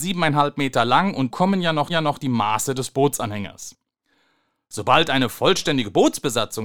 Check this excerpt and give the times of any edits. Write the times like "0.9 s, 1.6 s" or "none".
1.3 s, 1.9 s